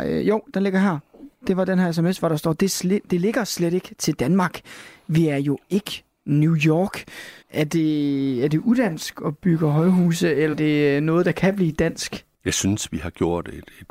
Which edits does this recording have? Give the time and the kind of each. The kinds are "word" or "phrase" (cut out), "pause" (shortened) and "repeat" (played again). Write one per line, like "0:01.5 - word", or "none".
0:07.4 - pause
0:10.5 - word
0:12.3 - pause